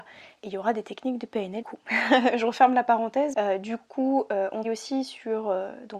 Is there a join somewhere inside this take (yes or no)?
yes